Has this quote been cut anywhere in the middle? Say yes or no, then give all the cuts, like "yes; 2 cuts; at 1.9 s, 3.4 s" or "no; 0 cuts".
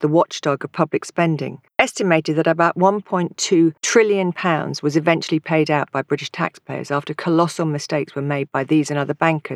yes; 2 cuts; at 1.7 s, 3.8 s